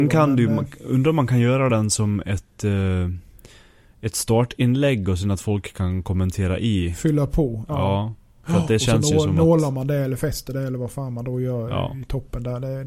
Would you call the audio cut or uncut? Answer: uncut